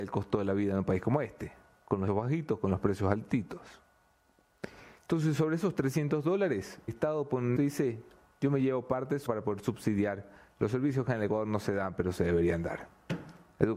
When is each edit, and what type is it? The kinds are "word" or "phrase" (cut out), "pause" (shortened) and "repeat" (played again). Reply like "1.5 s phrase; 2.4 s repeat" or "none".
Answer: 2.1 s word; 6.9 s word; 7.6 s word; 9.3 s word